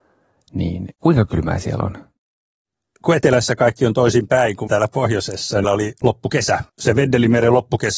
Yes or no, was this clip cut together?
yes